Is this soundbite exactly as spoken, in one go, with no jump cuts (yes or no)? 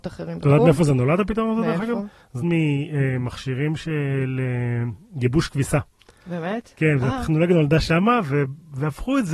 no